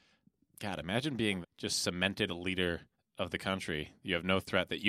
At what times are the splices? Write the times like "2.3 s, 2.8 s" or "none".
1.4 s, 2.3 s, 2.9 s